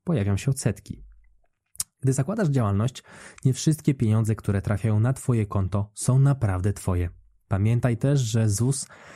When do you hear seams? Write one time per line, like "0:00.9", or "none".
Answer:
none

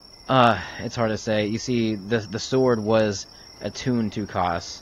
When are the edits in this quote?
none

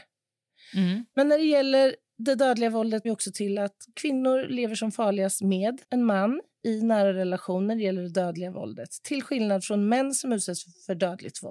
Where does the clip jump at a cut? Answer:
0:03.0
0:05.8

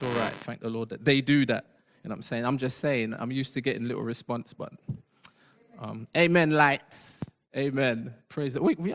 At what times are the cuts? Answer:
none

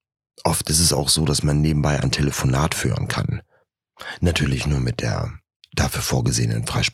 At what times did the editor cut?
none

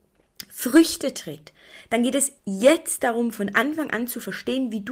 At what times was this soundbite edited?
0:02.4

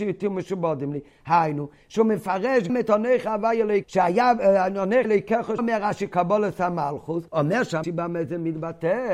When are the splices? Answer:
0:02.7
0:03.8
0:05.0
0:05.6
0:07.3
0:07.8

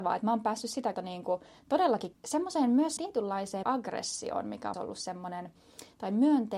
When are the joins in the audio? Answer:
0:00.9
0:02.1
0:03.0
0:03.6
0:04.7

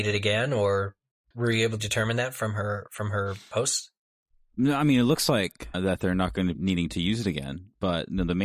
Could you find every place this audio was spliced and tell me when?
0:01.3
0:01.8
0:05.7
0:06.6

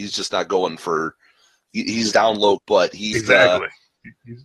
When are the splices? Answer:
0:02.1
0:02.6
0:03.1

